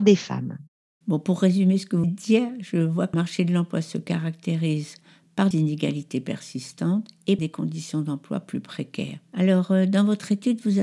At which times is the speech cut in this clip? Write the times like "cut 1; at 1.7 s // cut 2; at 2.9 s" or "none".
cut 1; at 2.0 s // cut 2; at 3.1 s // cut 3; at 5.5 s // cut 4; at 7.4 s